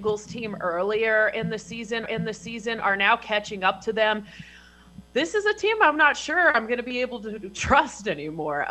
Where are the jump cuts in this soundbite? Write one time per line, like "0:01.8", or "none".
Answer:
0:02.1